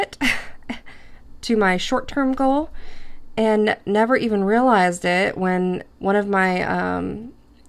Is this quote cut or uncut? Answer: cut